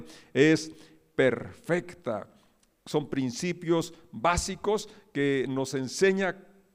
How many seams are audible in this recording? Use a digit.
0